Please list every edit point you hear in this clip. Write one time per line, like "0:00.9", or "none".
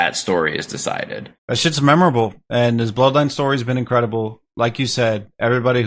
0:01.4